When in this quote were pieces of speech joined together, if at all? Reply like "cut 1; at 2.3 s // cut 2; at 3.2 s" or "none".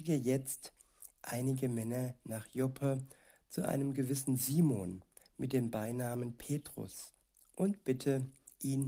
none